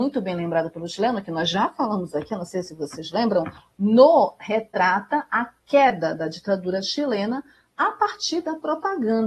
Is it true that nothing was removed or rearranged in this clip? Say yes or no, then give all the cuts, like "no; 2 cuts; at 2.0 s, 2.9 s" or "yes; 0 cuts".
yes; 0 cuts